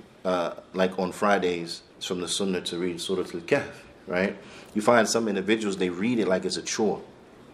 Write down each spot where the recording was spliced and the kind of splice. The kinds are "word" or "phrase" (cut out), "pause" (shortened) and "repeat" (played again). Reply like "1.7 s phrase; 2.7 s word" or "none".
1.9 s pause; 3.9 s pause